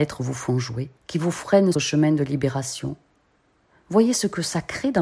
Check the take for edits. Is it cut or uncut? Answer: cut